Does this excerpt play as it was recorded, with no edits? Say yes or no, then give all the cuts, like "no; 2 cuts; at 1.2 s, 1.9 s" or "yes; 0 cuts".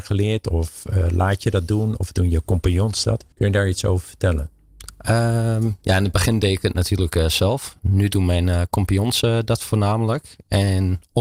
no; 1 cut; at 3.3 s